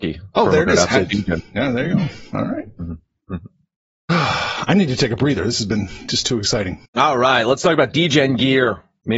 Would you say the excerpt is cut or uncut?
cut